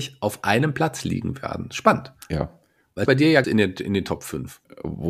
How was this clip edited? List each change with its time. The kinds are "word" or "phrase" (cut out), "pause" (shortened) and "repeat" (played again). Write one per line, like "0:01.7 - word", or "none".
0:02.2 - pause
0:03.1 - phrase
0:03.4 - phrase